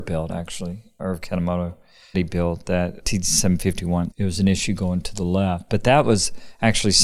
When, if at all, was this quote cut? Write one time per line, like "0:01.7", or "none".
0:01.0
0:02.1
0:03.0
0:04.1